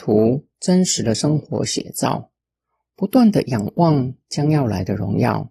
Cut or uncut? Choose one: uncut